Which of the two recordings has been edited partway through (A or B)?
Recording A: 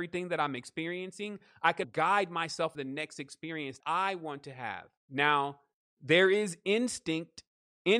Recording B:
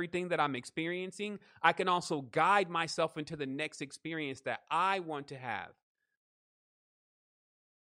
A